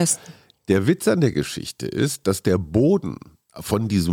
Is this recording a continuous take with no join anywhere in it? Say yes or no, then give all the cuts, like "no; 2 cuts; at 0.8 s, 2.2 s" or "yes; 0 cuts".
yes; 0 cuts